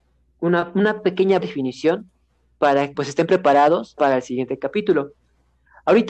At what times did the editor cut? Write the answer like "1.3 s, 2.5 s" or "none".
1.4 s, 2.9 s, 4.0 s